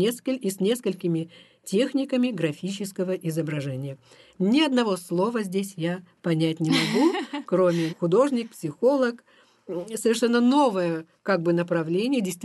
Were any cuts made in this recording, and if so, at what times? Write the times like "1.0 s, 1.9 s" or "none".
7.9 s